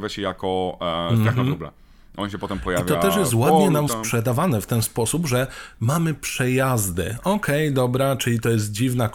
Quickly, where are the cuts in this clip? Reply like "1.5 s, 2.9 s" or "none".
3.9 s